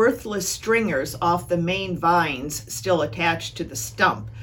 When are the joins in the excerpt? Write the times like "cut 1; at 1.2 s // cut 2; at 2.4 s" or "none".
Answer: none